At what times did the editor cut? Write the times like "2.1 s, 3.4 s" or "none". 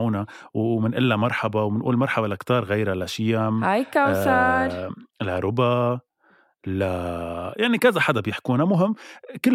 none